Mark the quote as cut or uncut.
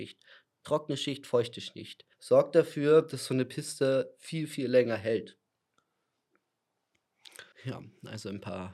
cut